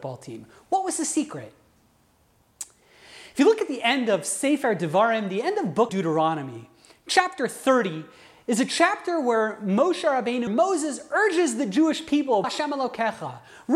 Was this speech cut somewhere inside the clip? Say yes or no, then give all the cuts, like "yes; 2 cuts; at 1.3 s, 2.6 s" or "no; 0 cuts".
yes; 3 cuts; at 5.9 s, 10.5 s, 12.4 s